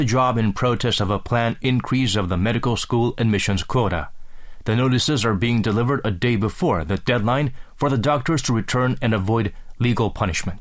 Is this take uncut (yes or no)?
yes